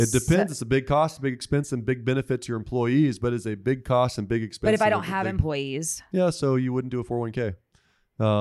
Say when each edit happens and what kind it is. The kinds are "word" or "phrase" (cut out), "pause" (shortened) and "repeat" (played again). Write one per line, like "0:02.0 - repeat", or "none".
none